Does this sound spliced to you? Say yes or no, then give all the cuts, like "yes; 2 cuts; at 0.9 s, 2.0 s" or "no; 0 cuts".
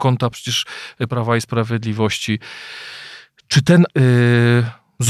yes; 2 cuts; at 1.1 s, 3.9 s